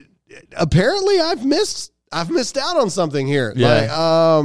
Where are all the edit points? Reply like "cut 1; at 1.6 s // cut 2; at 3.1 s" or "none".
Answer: none